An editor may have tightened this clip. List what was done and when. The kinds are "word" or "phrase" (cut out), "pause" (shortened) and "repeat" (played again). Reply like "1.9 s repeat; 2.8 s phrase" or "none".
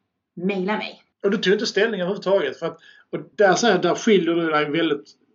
1.1 s pause; 3.3 s pause